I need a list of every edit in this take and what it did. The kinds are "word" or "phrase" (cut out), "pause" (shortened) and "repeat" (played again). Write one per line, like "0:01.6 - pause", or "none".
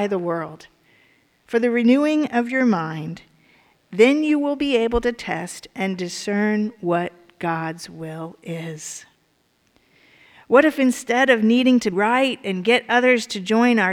0:11.9 - word